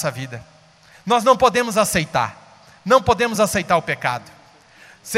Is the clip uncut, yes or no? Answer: yes